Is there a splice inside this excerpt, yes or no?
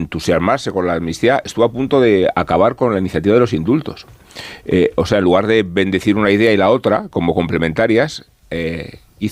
no